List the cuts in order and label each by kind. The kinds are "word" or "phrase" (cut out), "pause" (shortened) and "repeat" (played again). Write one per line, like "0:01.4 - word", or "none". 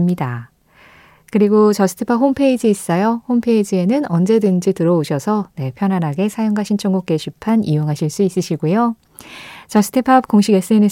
none